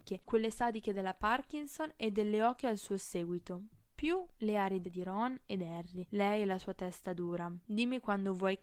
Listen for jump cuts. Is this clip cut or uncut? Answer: cut